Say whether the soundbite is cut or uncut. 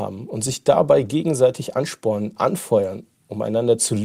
uncut